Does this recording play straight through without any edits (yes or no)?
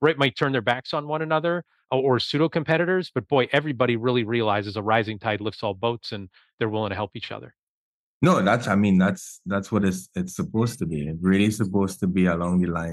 yes